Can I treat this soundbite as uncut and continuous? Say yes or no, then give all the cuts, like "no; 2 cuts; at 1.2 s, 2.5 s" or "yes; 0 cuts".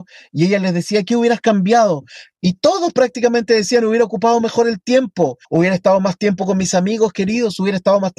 no; 1 cut; at 5.4 s